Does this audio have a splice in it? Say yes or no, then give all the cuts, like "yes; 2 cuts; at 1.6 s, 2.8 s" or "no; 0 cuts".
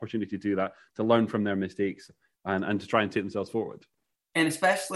no; 0 cuts